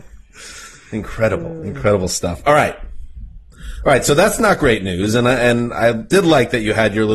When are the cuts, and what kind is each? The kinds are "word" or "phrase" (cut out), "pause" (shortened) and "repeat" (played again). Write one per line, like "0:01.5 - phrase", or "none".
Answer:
none